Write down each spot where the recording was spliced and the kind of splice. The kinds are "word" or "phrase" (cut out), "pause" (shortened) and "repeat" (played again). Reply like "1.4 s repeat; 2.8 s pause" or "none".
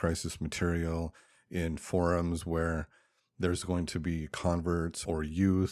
none